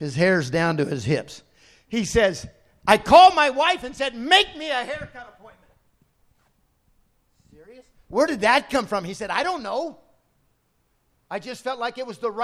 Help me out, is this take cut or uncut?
uncut